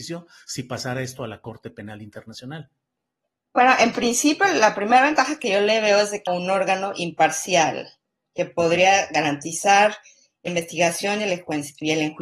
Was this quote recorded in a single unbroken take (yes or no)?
no